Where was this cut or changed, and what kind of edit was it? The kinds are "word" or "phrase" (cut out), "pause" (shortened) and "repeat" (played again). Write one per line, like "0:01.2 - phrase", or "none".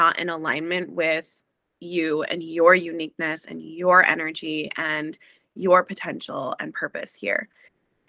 none